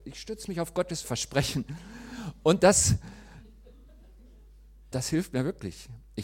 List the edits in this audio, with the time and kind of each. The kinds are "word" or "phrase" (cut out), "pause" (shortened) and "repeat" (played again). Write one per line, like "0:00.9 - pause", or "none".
0:01.0 - word
0:04.9 - word